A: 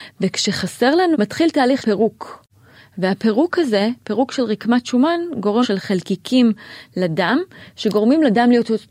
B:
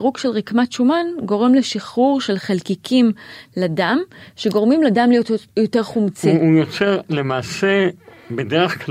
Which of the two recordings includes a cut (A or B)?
A